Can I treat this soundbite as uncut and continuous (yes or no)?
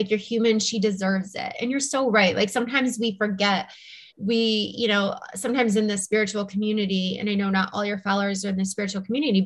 no